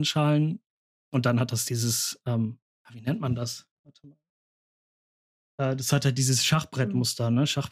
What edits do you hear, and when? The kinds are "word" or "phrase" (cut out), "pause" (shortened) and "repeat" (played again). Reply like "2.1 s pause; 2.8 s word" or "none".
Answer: none